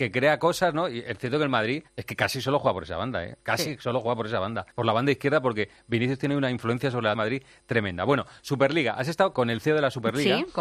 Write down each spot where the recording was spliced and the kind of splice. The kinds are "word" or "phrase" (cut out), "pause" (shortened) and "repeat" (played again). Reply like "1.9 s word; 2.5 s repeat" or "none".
1.9 s pause; 4.7 s pause; 7.1 s phrase; 9.3 s word